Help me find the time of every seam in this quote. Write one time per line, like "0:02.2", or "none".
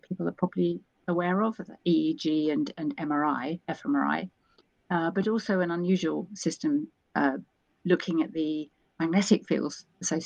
none